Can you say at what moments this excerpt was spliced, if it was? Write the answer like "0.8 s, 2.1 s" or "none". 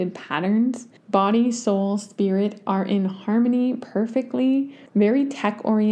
1.0 s, 4.9 s